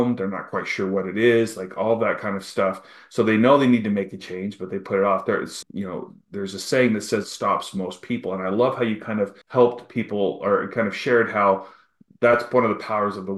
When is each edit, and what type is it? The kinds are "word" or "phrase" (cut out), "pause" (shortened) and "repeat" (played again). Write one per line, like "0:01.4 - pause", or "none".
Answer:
0:05.6 - word
0:07.2 - phrase
0:09.4 - pause

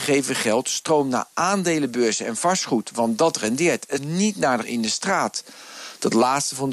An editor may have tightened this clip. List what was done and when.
0:04.0 - word
0:04.6 - phrase

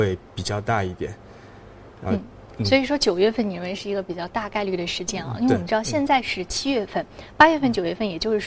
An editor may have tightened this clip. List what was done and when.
0:02.0 - pause

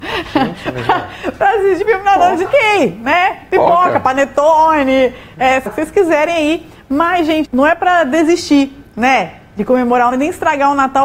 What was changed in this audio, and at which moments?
0:01.8 - word
0:02.4 - word
0:05.7 - word
0:07.4 - word
0:10.1 - word

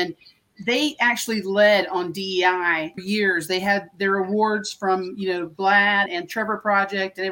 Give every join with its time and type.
0:03.0 - word
0:06.1 - word

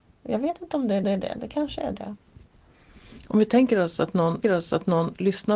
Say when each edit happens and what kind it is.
0:01.0 - repeat
0:04.4 - repeat

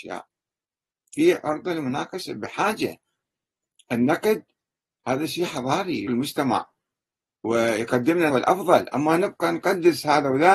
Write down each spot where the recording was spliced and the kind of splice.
0:06.1 - word
0:08.3 - word

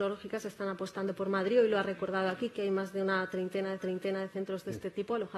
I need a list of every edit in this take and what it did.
0:03.8 - repeat

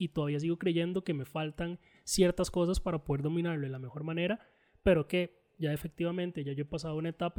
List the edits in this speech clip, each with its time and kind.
none

